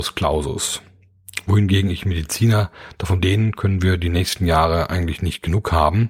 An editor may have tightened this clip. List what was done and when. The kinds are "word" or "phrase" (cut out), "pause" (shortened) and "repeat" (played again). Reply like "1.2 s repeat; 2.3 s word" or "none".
3.2 s phrase